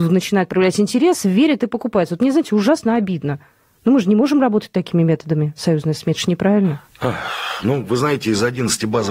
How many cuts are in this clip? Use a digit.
0